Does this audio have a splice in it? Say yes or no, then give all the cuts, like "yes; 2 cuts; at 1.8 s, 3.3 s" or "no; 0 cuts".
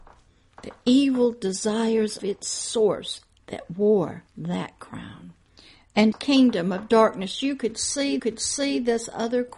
yes; 5 cuts; at 2.2 s, 3.4 s, 4.3 s, 6.1 s, 8.2 s